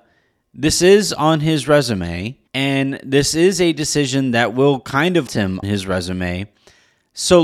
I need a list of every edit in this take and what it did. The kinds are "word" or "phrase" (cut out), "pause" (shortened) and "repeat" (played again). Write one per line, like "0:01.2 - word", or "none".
0:02.5 - pause
0:05.3 - word
0:05.6 - word